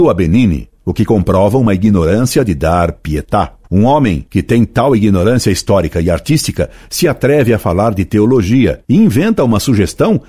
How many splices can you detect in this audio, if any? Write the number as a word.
three